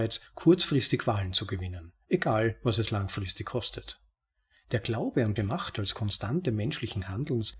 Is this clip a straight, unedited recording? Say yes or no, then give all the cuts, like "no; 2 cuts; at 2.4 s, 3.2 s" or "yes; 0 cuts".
no; 1 cut; at 5.4 s